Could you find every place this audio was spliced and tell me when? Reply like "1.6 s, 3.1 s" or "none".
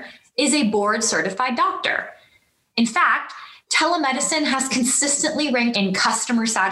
5.7 s